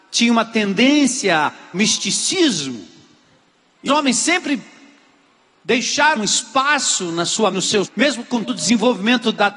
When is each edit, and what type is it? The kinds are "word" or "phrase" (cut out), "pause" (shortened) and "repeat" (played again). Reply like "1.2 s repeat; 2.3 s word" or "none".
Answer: 1.7 s word; 3.9 s word; 6.2 s word; 7.5 s word; 7.8 s word; 8.4 s word